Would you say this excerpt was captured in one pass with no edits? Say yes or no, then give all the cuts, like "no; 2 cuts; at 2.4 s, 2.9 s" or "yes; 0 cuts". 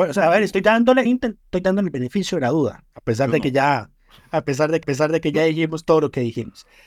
no; 3 cuts; at 1.1 s, 2.9 s, 4.8 s